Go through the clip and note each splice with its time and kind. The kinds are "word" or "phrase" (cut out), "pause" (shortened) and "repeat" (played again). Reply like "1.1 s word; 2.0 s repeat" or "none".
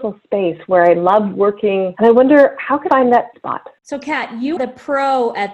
2.9 s word; 3.3 s word; 4.6 s word